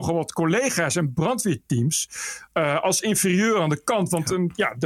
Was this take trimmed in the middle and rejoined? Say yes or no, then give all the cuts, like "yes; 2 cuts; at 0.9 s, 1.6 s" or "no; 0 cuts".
no; 0 cuts